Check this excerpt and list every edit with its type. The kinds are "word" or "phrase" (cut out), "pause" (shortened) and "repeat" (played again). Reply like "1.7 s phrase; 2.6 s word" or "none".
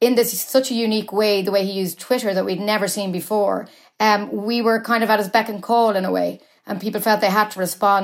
none